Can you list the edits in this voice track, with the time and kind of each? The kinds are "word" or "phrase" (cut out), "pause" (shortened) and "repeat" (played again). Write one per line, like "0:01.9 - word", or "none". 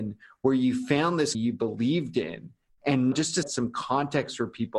0:01.3 - word
0:03.1 - word
0:03.4 - word